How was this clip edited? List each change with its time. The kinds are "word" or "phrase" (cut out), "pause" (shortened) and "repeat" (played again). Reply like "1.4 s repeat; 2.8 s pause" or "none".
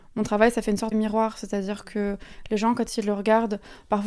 0.9 s word